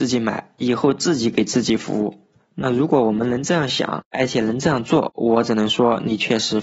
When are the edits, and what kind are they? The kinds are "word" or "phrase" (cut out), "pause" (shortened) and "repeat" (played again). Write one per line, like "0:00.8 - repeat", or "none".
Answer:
none